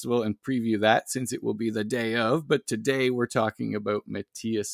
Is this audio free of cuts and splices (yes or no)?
yes